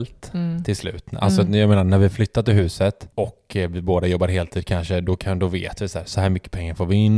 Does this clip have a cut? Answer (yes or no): no